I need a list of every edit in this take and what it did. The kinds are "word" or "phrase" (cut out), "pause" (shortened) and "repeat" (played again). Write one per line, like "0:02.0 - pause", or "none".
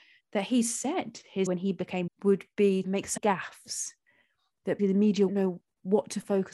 0:01.5 - word
0:02.1 - word
0:02.8 - word
0:03.2 - word
0:04.8 - word
0:05.3 - word